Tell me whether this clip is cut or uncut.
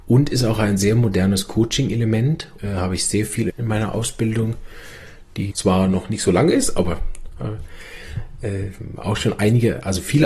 cut